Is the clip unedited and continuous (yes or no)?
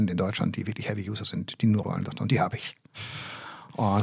no